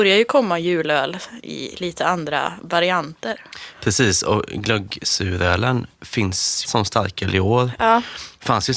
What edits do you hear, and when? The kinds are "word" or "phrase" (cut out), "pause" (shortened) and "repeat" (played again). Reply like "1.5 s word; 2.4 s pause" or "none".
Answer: 6.6 s phrase

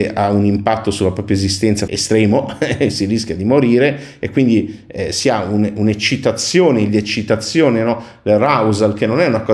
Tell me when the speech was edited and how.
1.9 s phrase; 6.9 s word

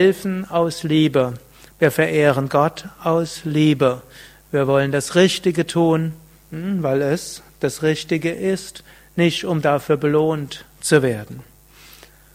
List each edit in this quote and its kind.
none

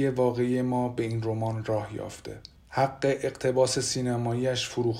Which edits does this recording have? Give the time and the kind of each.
2.6 s pause

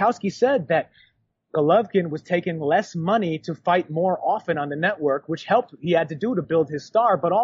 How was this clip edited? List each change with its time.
none

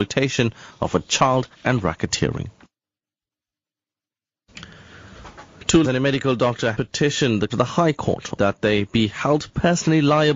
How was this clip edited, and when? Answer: 1.5 s pause; 5.8 s word; 6.7 s word; 7.5 s phrase; 8.4 s word

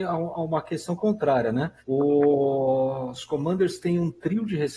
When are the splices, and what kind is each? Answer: 1.8 s pause

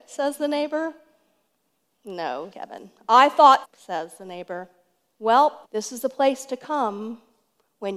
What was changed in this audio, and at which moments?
2.5 s word; 3.6 s word; 5.6 s pause

